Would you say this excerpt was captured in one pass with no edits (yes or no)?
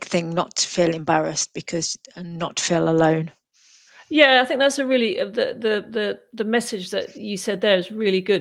yes